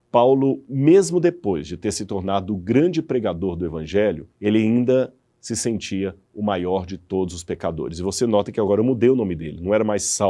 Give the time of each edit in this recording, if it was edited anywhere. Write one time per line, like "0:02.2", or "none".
0:04.3